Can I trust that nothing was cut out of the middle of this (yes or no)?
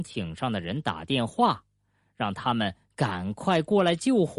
yes